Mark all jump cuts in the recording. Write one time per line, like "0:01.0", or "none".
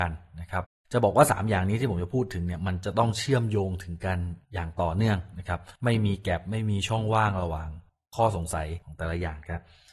0:05.8
0:08.8